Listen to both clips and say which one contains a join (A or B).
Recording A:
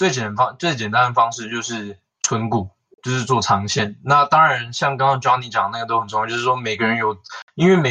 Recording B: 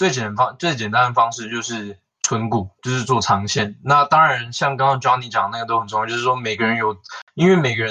B